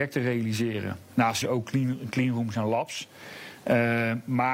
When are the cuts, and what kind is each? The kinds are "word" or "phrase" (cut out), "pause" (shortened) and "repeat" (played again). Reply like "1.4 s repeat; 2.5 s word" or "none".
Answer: 1.4 s word